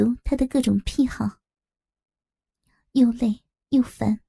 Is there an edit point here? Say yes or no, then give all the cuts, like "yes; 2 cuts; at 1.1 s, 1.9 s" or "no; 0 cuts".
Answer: no; 0 cuts